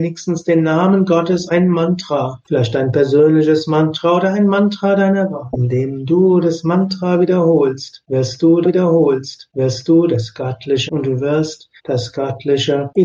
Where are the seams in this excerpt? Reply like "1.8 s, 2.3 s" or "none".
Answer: 1.5 s, 8.6 s, 10.9 s, 11.8 s